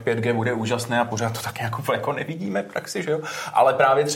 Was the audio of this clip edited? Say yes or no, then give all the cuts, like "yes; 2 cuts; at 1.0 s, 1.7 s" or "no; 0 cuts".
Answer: no; 0 cuts